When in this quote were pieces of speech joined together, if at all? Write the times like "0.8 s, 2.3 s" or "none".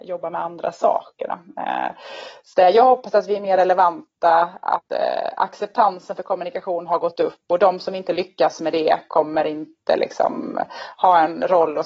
2.5 s